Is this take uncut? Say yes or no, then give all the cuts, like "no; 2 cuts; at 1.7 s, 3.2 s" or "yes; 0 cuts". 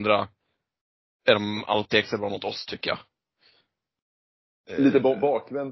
yes; 0 cuts